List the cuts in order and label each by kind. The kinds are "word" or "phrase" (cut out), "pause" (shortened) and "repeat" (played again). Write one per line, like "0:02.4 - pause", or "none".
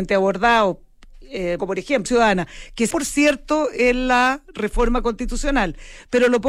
0:01.6 - word
0:02.1 - word
0:02.9 - word